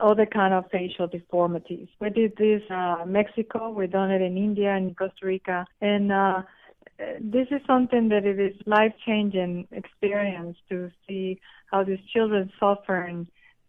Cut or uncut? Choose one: cut